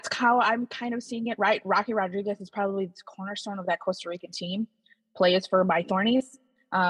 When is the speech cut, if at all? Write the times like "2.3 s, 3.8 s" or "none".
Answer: none